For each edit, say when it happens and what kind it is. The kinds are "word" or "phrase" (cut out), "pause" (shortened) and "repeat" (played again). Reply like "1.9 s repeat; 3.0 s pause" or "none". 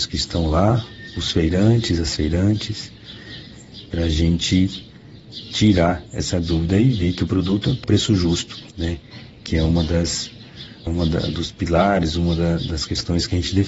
7.8 s word; 8.7 s pause; 10.9 s word